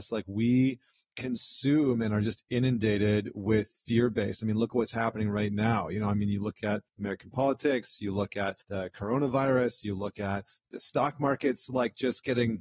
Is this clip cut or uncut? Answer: cut